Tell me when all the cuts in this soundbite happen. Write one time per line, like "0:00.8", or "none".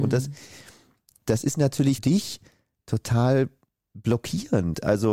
0:02.0